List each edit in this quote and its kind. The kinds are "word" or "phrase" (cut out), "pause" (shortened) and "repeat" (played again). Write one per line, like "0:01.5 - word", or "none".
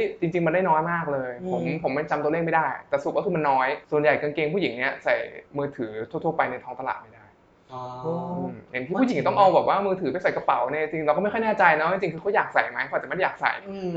0:03.8 - pause
0:05.5 - pause

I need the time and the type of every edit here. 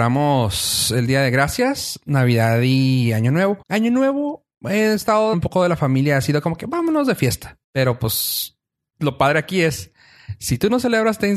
0:03.6 - pause
0:05.3 - word
0:07.6 - pause
0:08.8 - pause

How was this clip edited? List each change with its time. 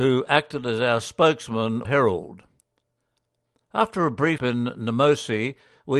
0:01.8 - word
0:04.4 - word

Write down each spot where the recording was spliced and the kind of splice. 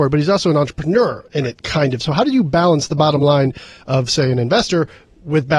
none

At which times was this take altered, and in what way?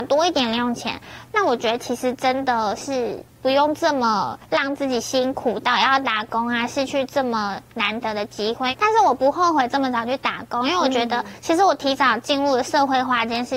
0:03.3 - pause
0:04.4 - pause

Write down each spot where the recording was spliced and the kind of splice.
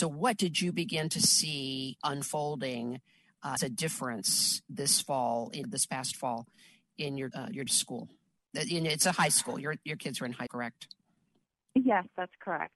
0:02.0 - word
0:03.6 - word
0:05.6 - word
0:07.3 - word
0:07.7 - word
0:10.5 - word

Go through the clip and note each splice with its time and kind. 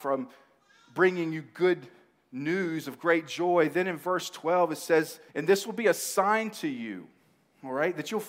0:05.3 - pause

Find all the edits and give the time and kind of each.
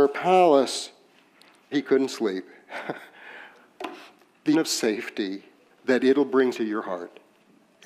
0:01.7 - word
0:04.5 - word
0:06.5 - word

